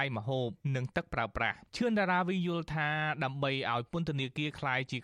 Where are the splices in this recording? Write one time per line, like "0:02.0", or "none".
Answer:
0:01.7